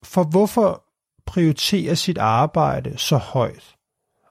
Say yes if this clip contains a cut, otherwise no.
no